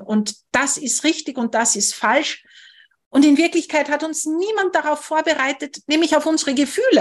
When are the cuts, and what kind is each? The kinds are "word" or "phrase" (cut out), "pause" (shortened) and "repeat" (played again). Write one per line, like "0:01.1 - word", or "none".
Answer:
none